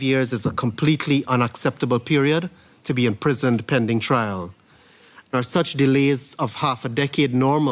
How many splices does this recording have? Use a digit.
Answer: 0